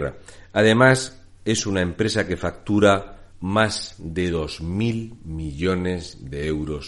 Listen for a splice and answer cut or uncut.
cut